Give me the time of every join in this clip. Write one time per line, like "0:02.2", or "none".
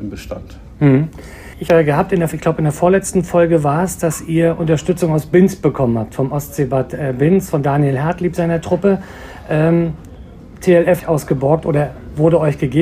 0:01.7
0:11.0